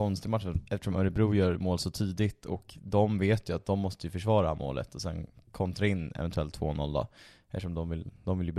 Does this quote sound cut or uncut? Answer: uncut